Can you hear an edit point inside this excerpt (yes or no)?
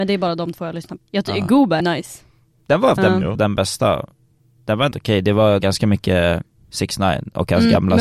yes